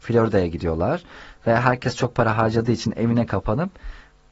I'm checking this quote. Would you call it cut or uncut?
uncut